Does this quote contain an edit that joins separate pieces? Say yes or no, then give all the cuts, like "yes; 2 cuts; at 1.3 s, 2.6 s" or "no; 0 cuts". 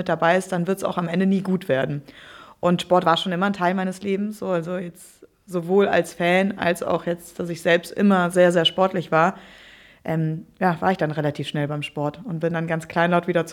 no; 0 cuts